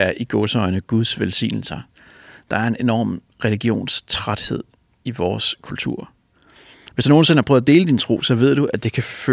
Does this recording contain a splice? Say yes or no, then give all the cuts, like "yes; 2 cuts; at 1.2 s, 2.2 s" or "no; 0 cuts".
no; 0 cuts